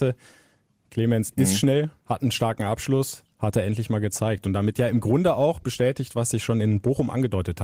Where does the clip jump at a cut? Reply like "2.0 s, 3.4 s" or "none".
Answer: 2.0 s